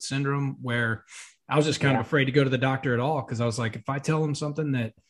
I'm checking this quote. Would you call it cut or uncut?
uncut